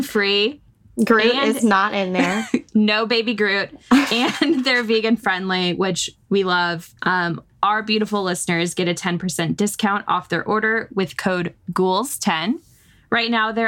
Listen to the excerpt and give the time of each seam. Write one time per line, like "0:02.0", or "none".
0:07.0